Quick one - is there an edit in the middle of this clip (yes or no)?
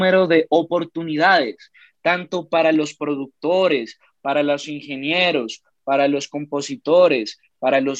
no